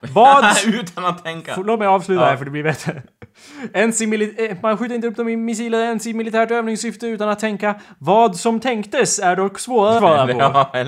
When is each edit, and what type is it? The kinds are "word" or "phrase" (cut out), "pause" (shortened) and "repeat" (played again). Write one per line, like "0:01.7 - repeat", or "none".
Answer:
0:10.0 - word